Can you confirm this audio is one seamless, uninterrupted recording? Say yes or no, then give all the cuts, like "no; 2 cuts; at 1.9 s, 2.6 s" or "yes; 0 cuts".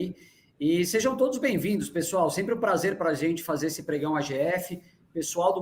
yes; 0 cuts